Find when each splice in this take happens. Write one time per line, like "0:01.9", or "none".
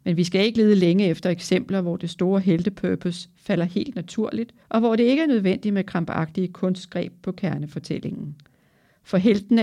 0:04.6

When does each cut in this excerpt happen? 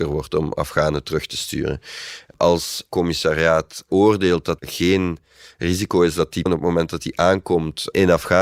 0:02.9
0:04.6
0:06.5

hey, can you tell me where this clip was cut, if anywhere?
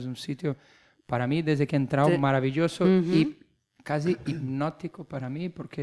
none

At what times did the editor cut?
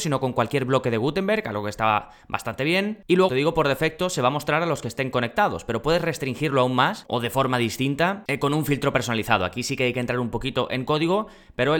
0:03.3

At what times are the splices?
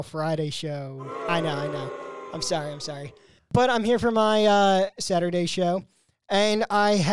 none

